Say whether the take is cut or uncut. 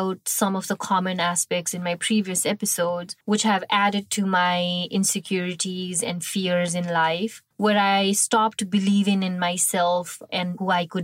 cut